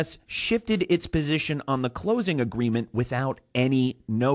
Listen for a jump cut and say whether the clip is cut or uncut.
uncut